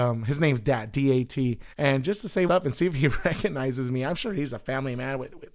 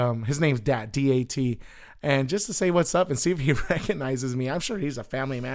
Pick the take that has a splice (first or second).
first